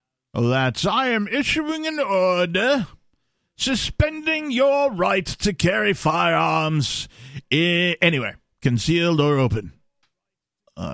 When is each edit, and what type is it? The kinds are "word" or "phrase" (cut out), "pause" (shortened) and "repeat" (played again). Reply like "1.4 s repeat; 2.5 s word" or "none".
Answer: none